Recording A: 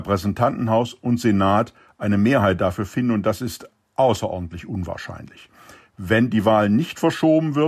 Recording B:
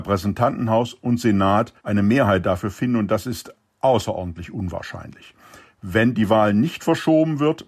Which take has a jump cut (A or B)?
B